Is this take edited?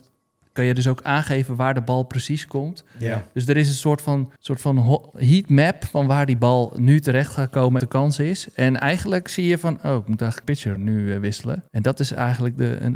yes; 5 cuts; at 4.4 s, 7.8 s, 10.4 s, 10.8 s, 11.7 s

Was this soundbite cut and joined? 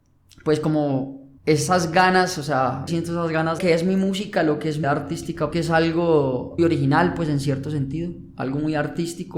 yes; 6 cuts; at 1.4 s, 2.9 s, 3.6 s, 4.8 s, 5.5 s, 6.6 s

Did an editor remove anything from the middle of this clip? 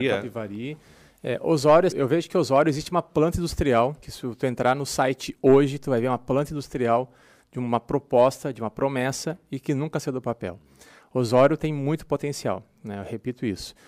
yes; 2 cuts; at 1.9 s, 4.0 s

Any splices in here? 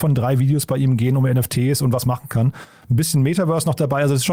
yes; 1 cut; at 2.0 s

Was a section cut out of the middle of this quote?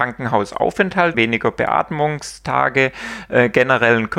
yes; 1 cut; at 1.1 s

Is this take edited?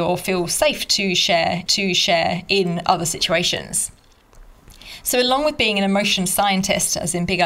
yes; 1 cut; at 1.7 s

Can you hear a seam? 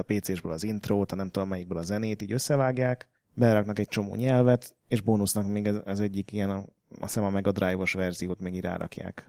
yes; 1 cut; at 4.8 s

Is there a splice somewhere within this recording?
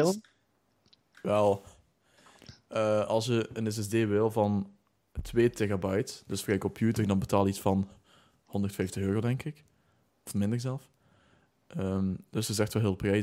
no; 0 cuts

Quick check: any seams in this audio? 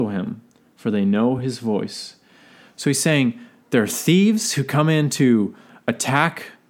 no; 0 cuts

